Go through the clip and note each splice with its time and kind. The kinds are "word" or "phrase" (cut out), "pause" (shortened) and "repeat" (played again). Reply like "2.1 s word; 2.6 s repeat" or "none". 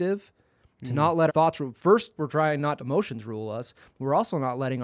1.3 s word; 2.2 s word; 2.8 s phrase